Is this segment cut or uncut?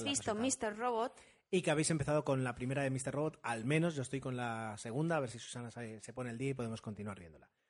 uncut